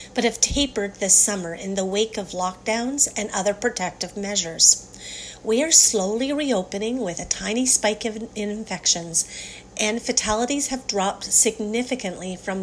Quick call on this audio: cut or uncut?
uncut